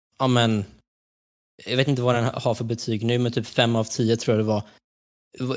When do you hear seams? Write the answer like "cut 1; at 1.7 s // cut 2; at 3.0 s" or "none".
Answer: none